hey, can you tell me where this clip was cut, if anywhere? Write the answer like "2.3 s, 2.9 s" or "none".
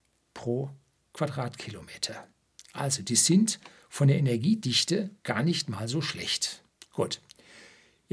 5.2 s, 6.7 s